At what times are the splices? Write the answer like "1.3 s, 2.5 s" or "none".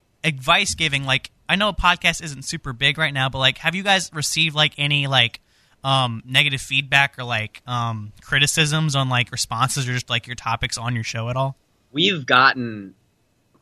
none